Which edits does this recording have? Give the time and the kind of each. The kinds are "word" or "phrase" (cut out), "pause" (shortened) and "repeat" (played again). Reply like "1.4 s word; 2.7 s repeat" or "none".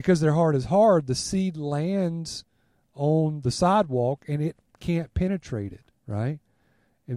6.0 s pause